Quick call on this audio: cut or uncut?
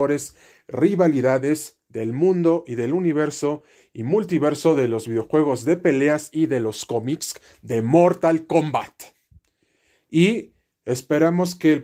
uncut